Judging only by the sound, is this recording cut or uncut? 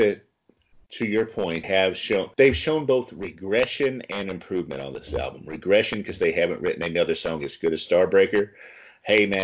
cut